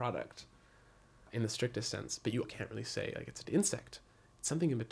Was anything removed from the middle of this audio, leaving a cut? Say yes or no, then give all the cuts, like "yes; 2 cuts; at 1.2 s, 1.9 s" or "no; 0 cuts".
yes; 2 cuts; at 2.4 s, 3.4 s